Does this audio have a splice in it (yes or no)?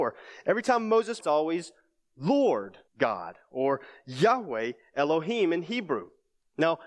yes